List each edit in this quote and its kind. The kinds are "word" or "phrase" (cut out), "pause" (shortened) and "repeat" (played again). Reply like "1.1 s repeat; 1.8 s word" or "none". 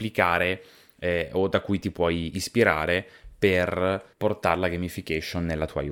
4.1 s pause